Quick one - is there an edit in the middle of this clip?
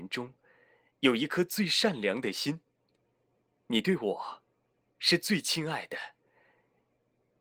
no; 0 cuts

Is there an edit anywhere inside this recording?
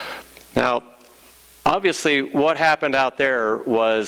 no; 0 cuts

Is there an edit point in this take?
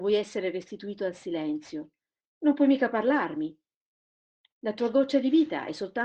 no; 0 cuts

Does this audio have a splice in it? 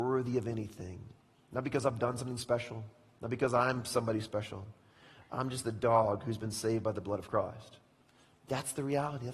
no; 0 cuts

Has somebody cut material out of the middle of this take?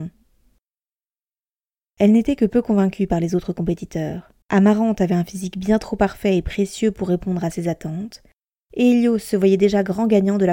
yes; 1 cut; at 4.4 s

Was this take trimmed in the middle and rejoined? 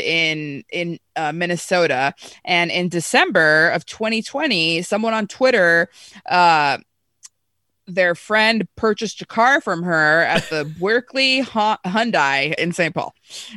yes; 1 cut; at 12.6 s

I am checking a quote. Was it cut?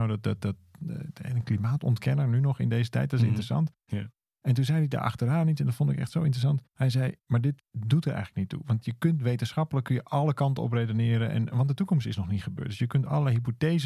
no; 0 cuts

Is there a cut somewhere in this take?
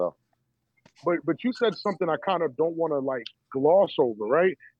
yes; 1 cut; at 3.4 s

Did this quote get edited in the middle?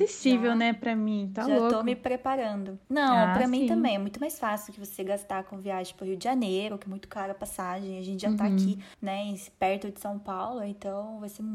no; 0 cuts

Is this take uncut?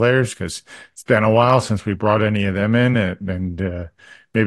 yes; 0 cuts

